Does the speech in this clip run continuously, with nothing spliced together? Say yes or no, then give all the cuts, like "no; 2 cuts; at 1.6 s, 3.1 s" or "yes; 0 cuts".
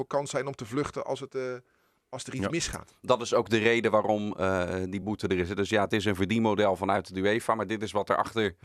yes; 0 cuts